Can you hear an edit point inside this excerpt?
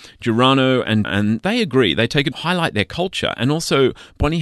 yes; 2 cuts; at 1.0 s, 2.3 s

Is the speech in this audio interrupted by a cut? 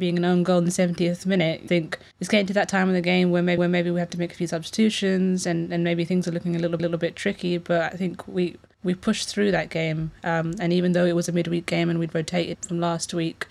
yes; 4 cuts; at 1.7 s, 3.6 s, 6.8 s, 12.5 s

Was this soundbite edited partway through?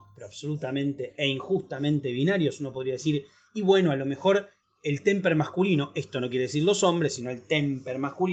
no; 0 cuts

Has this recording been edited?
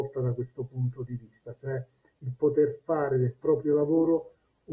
no; 0 cuts

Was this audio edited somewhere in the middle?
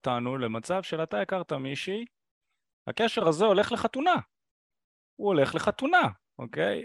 no; 0 cuts

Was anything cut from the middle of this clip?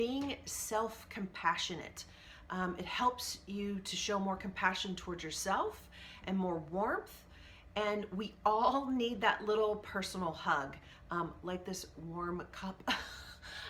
no; 0 cuts

